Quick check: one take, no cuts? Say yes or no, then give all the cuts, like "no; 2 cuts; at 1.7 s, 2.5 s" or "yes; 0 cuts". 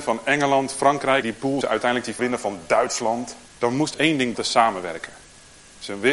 no; 6 cuts; at 1.2 s, 1.6 s, 2.2 s, 3.5 s, 3.9 s, 4.3 s